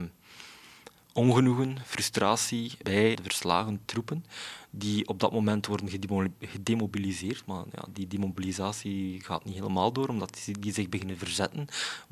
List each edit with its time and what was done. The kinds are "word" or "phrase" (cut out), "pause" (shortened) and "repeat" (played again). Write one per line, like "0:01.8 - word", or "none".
0:02.8 - word
0:03.1 - word
0:03.9 - word